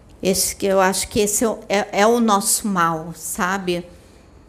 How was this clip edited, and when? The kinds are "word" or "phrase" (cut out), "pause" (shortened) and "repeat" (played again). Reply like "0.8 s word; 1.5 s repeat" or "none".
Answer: none